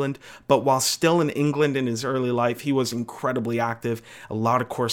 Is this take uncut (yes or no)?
yes